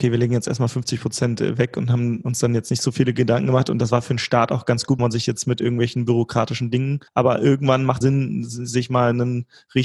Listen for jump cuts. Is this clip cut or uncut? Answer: cut